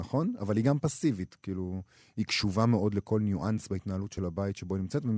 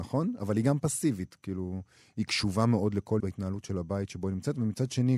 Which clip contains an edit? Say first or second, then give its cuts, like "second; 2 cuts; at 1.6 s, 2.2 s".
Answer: second; 1 cut; at 3.2 s